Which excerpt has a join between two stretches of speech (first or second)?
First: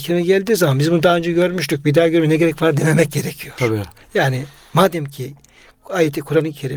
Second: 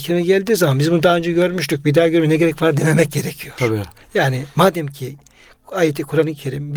second